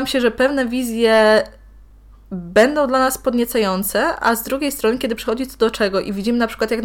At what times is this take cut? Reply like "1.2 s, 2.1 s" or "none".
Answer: none